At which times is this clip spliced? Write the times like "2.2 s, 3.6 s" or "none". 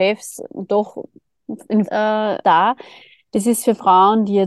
1.8 s, 2.4 s